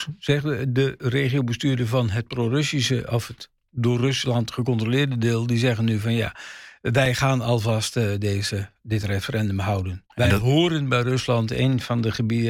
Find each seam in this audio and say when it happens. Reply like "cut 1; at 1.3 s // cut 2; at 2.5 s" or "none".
cut 1; at 10.1 s

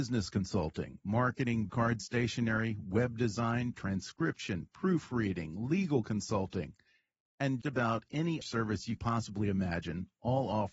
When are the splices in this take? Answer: cut 1; at 1.7 s // cut 2; at 2.0 s // cut 3; at 3.7 s // cut 4; at 7.6 s // cut 5; at 8.4 s // cut 6; at 9.0 s

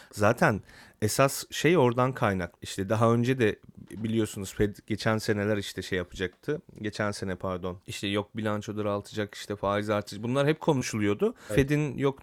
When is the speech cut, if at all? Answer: cut 1; at 7.8 s

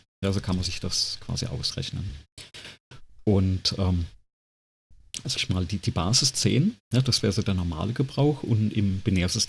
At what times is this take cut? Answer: cut 1; at 5.4 s

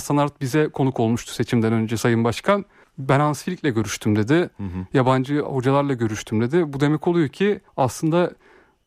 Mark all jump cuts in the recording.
cut 1; at 2.8 s // cut 2; at 7.7 s

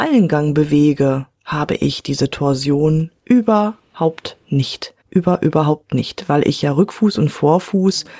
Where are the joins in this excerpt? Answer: cut 1; at 3.2 s // cut 2; at 5.0 s

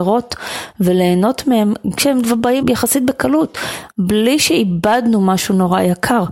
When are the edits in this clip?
cut 1; at 2.0 s // cut 2; at 2.6 s

